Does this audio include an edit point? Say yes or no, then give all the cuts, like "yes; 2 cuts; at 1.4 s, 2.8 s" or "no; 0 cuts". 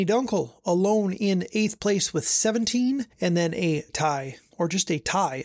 yes; 2 cuts; at 3.1 s, 3.9 s